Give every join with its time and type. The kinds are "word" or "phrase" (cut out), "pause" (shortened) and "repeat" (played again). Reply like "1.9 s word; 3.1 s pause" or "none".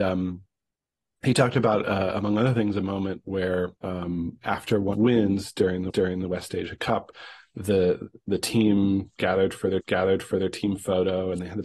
3.8 s pause; 4.9 s phrase; 5.9 s repeat; 9.8 s repeat